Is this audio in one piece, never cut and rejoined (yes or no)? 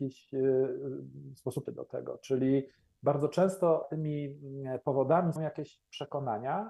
no